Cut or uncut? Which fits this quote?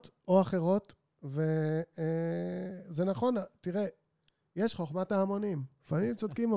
uncut